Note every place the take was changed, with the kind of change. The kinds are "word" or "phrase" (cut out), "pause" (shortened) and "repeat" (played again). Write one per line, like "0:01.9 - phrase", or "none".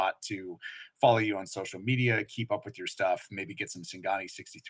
none